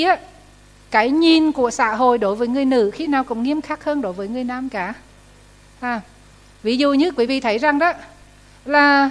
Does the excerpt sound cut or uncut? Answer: uncut